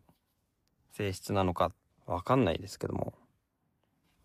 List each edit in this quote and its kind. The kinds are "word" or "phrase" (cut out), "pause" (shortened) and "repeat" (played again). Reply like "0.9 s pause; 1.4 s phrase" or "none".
1.9 s pause